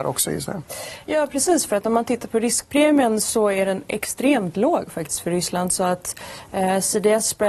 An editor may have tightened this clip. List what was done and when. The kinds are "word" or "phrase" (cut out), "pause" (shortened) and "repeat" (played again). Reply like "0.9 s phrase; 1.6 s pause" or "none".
none